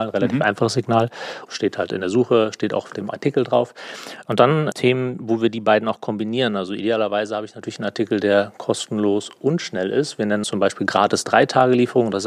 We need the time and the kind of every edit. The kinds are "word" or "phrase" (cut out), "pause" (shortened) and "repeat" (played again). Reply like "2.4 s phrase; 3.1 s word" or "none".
1.5 s phrase; 4.7 s word; 10.4 s phrase